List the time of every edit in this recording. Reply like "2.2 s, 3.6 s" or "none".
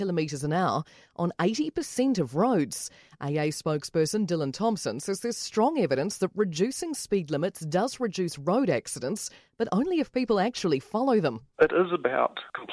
none